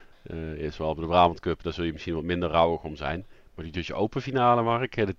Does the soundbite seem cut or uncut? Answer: uncut